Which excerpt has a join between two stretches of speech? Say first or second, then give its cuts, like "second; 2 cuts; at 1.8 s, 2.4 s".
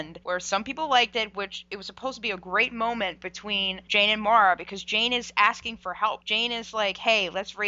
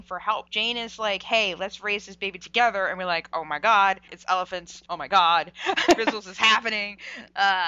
second; 1 cut; at 5.8 s